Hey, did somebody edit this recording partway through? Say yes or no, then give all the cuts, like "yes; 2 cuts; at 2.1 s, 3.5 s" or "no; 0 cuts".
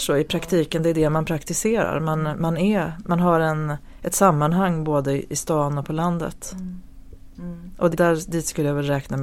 yes; 1 cut; at 7.9 s